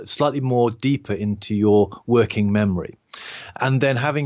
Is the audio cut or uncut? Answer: uncut